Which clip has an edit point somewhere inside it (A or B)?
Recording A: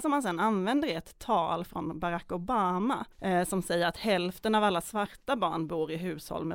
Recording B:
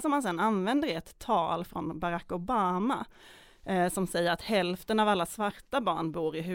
A